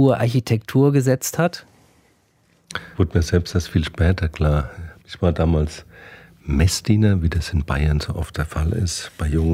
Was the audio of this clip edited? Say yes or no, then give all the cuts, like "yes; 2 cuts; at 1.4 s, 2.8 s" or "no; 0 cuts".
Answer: yes; 2 cuts; at 2.9 s, 5.0 s